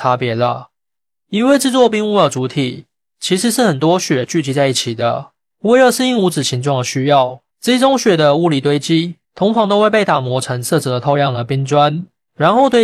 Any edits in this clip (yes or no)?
yes